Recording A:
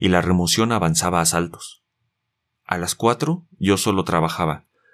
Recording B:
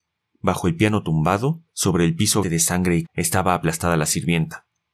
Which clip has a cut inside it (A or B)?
B